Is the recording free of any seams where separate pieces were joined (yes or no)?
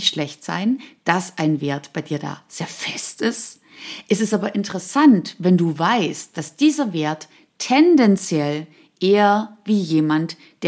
yes